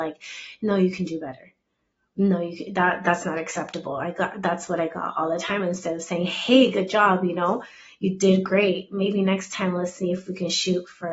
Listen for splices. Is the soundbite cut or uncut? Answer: uncut